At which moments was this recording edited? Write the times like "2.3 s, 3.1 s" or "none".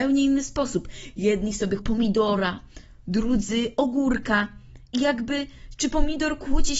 1.8 s